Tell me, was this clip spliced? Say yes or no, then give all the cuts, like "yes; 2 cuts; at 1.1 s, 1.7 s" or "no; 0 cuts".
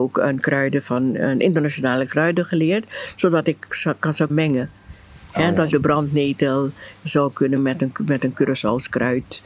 yes; 3 cuts; at 4.3 s, 5.7 s, 7.6 s